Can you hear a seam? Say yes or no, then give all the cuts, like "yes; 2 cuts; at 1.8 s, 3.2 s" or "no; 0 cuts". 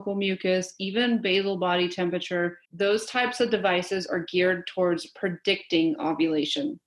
yes; 1 cut; at 2.7 s